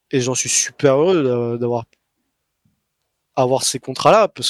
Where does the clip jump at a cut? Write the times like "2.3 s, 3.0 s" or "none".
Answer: none